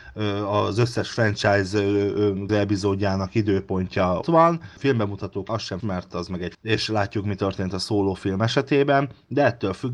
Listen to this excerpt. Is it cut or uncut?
cut